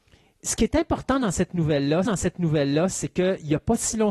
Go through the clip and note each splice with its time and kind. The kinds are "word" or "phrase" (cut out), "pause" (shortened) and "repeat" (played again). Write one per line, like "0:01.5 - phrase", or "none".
0:02.1 - repeat